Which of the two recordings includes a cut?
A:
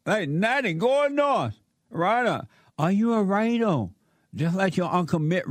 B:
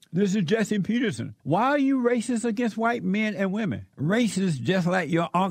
B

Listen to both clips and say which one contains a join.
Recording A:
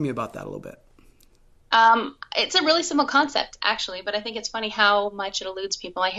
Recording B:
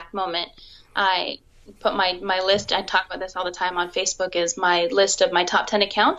B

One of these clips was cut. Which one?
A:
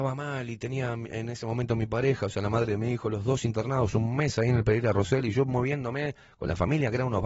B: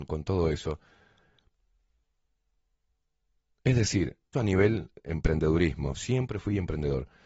B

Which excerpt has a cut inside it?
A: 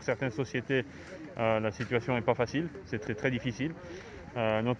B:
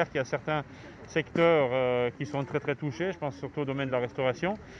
A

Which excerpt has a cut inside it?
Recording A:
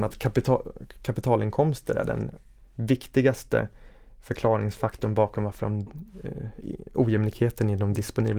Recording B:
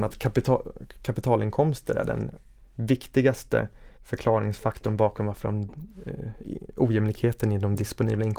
B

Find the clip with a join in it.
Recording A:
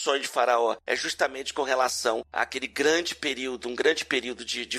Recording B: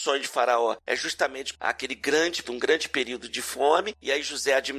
B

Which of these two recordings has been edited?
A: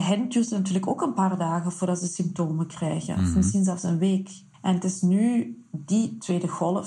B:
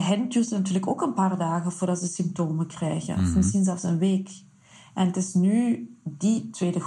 A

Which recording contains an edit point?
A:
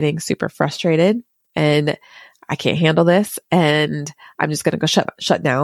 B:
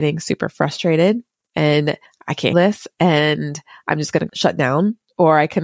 B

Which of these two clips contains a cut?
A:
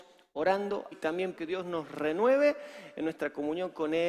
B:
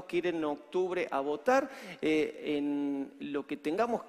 A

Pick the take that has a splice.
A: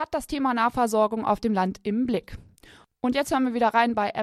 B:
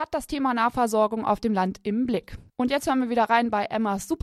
B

